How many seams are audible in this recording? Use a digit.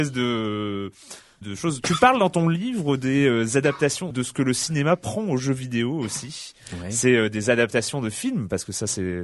2